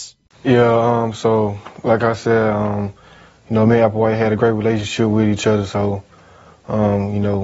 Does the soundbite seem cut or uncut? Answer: uncut